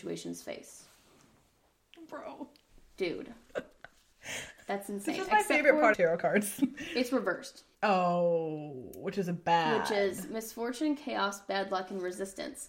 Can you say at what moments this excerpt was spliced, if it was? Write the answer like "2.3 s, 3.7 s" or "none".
5.9 s, 7.7 s